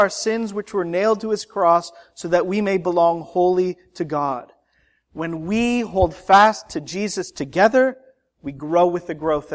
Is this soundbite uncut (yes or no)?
yes